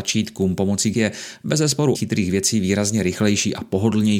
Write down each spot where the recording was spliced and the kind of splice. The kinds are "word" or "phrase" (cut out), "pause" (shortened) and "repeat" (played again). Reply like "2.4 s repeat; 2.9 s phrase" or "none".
0.9 s word; 1.9 s word